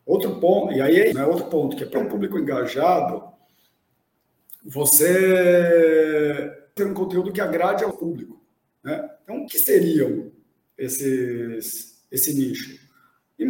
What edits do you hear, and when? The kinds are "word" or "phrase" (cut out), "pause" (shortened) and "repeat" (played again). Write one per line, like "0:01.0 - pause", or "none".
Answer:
0:01.1 - word
0:01.9 - word
0:06.8 - word
0:07.9 - word
0:09.5 - word